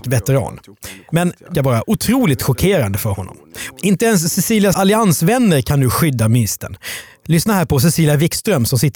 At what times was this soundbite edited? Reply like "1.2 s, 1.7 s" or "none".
1.5 s, 4.7 s